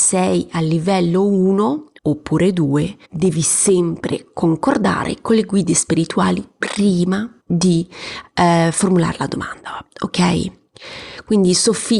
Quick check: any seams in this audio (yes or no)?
yes